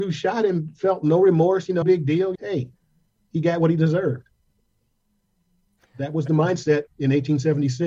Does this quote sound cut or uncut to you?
cut